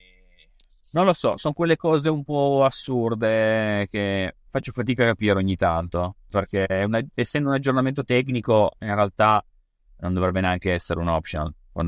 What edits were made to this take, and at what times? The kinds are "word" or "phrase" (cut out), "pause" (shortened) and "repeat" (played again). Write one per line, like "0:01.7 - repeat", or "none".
none